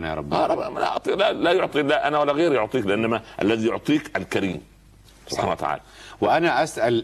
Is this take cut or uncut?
uncut